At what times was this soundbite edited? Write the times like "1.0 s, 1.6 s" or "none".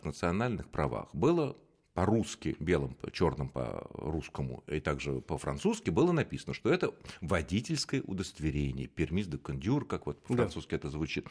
none